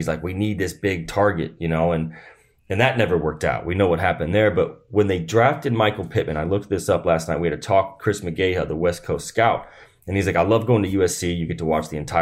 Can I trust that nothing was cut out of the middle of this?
yes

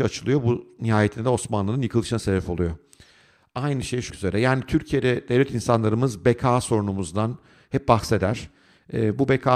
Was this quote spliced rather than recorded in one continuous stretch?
yes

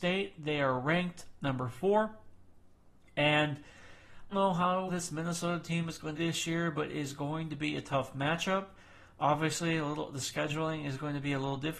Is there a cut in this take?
yes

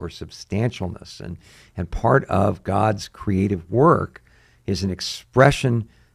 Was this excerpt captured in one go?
yes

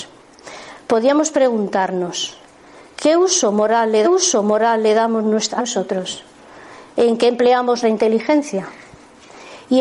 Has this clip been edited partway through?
yes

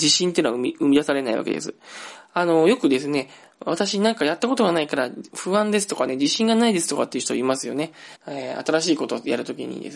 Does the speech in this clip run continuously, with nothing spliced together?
no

